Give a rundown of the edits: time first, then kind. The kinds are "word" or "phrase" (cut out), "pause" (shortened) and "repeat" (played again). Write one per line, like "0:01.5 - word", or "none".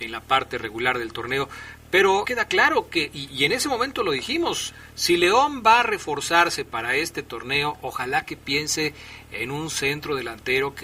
0:02.2 - phrase